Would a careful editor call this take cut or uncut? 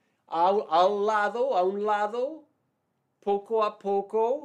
uncut